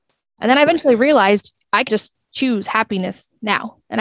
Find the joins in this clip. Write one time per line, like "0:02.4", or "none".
0:01.9